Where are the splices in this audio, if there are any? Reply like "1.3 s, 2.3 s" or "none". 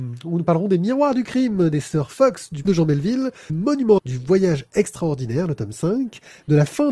2.6 s, 3.5 s, 4.0 s